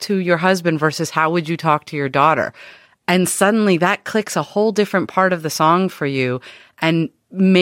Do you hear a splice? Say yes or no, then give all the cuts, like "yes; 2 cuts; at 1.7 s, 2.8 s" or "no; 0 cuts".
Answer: no; 0 cuts